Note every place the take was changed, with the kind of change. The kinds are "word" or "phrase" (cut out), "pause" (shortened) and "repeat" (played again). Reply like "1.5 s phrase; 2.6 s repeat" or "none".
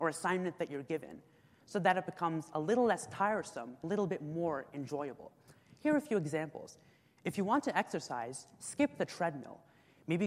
3.8 s phrase